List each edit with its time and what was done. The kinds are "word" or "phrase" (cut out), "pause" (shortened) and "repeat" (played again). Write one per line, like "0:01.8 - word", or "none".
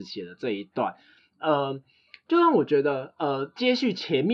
none